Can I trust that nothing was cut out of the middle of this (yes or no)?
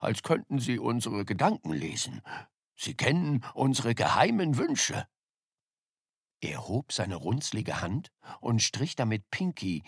yes